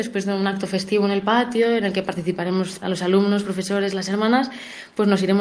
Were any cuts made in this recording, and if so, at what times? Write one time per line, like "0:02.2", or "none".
0:02.8